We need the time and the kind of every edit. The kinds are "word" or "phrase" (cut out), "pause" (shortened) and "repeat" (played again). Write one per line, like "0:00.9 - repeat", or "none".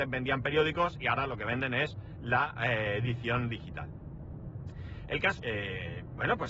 0:05.4 - phrase